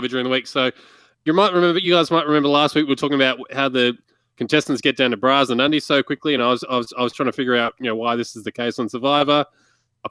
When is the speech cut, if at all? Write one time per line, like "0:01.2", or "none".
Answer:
none